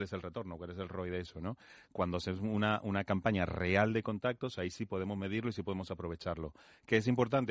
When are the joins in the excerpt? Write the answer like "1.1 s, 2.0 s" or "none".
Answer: none